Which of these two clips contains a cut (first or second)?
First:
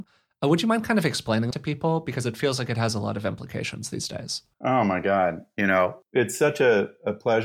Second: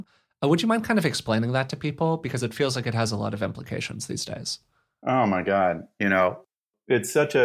first